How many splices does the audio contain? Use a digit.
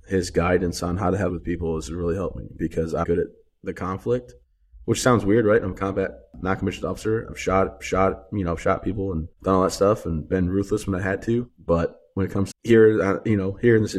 5